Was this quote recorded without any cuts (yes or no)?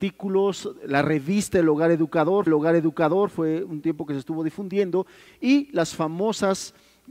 no